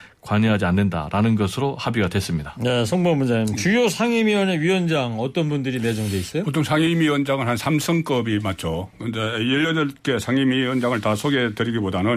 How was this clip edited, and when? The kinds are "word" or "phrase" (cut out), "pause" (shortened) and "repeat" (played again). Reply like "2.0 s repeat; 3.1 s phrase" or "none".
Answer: none